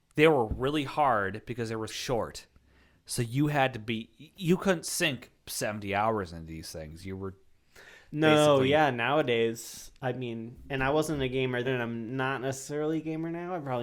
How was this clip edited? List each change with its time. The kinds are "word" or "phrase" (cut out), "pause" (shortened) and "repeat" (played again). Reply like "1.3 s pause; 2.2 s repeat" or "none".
1.9 s word; 11.6 s word